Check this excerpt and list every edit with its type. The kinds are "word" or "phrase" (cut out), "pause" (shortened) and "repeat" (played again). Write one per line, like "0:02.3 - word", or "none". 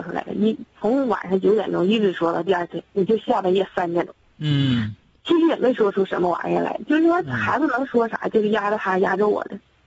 none